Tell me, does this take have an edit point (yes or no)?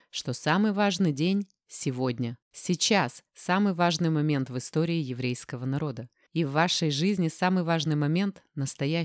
yes